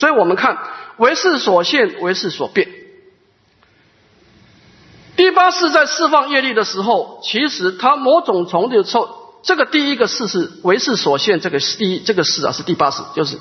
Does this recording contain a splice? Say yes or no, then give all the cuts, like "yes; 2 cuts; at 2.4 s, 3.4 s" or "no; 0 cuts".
no; 0 cuts